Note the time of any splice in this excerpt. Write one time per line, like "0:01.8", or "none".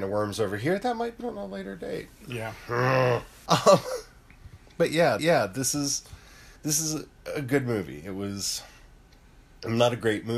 0:01.2
0:03.5
0:05.2
0:06.6